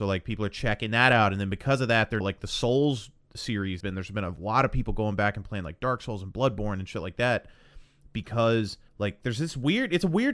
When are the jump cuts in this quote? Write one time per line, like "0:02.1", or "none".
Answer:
0:02.2
0:03.8
0:08.9